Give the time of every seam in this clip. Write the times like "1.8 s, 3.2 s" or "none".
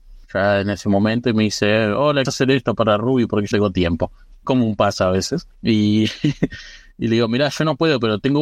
2.2 s, 3.5 s, 4.4 s